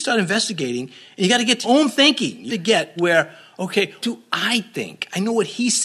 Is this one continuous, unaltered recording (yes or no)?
no